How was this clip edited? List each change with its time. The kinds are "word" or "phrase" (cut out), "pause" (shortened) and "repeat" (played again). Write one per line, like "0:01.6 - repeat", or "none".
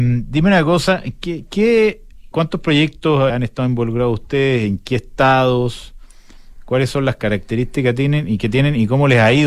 0:02.3 - word
0:03.3 - word